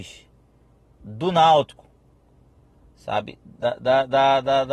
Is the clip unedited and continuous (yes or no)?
yes